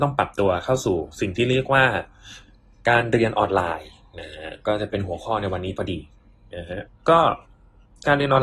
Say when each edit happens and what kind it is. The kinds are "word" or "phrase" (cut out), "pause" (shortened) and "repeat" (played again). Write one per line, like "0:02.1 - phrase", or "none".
none

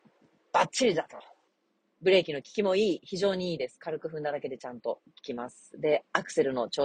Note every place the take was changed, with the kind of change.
0:01.5 - pause

